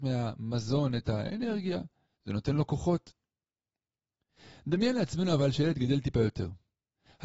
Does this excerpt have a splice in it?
no; 0 cuts

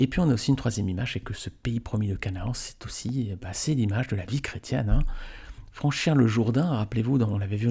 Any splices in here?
no; 0 cuts

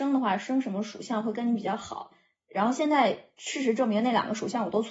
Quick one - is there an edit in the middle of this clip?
no; 0 cuts

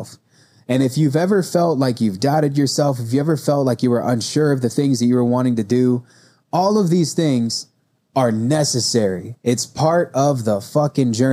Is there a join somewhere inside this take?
no; 0 cuts

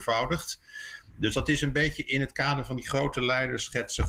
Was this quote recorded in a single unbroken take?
yes; 0 cuts

